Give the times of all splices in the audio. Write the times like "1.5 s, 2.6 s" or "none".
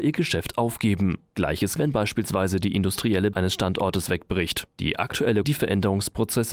1.8 s, 3.3 s, 5.4 s